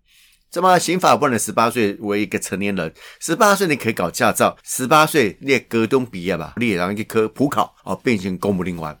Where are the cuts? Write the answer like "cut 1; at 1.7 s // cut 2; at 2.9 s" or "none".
cut 1; at 4.6 s // cut 2; at 6.6 s // cut 3; at 7.8 s